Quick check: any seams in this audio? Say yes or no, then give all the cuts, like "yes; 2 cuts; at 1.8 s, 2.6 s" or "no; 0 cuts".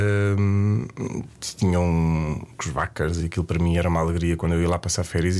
yes; 1 cut; at 2.6 s